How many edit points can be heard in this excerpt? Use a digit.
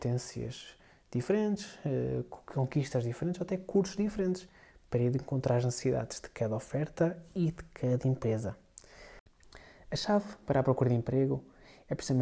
0